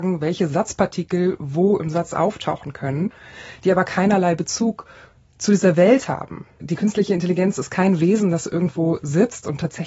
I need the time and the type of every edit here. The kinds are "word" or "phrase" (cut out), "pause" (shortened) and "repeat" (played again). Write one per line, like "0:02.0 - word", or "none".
none